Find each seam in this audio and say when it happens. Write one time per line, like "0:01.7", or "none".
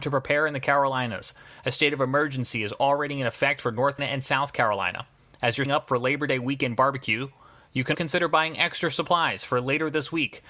0:04.0
0:05.7
0:07.9

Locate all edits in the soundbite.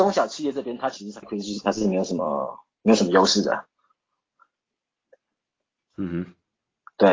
0:01.2
0:01.6

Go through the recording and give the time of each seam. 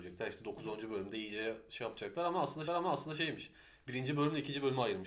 0:02.7

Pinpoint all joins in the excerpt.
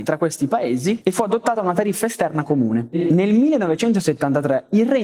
none

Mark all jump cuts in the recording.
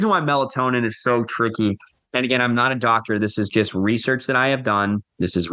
none

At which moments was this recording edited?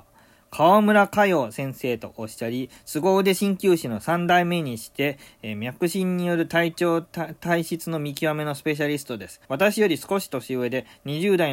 0:09.4

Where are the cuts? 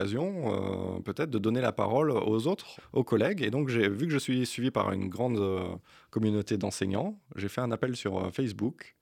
0:02.8

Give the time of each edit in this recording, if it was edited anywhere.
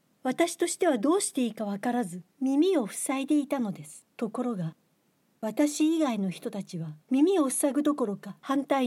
0:02.3
0:04.1
0:07.0

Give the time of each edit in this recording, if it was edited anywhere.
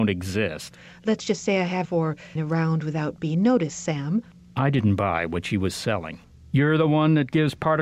0:01.8
0:02.4

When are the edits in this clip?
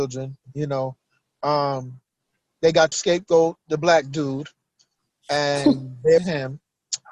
0:02.9
0:06.2

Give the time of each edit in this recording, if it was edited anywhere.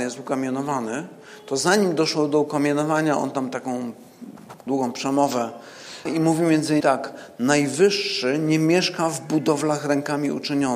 0:04.7
0:06.1
0:06.8

